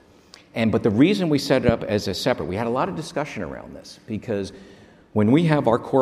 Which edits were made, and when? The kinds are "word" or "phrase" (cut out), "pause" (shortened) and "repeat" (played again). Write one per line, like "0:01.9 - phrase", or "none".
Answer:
none